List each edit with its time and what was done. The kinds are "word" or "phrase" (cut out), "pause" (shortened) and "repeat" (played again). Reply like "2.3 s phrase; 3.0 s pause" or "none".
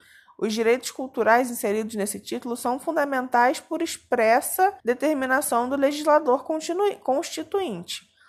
4.8 s pause